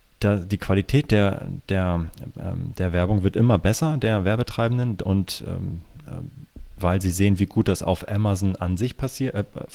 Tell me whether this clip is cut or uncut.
uncut